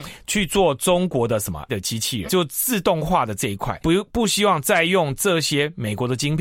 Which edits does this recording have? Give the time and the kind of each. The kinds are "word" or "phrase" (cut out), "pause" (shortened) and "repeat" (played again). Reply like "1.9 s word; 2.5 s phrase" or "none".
1.7 s word; 2.3 s word; 3.8 s word